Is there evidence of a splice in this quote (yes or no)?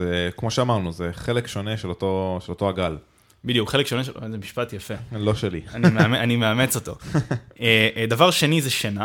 no